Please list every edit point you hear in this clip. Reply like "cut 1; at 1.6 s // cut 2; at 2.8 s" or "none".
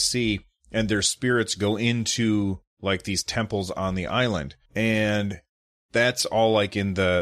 cut 1; at 4.7 s